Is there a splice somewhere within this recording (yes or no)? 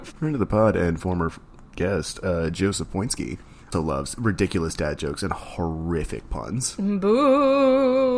yes